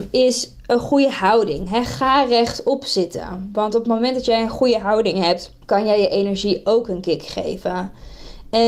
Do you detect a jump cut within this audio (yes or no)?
yes